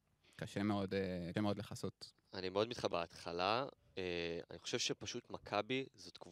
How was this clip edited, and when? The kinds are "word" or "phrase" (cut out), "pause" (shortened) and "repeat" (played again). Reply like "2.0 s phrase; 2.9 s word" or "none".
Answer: 1.3 s word; 2.9 s phrase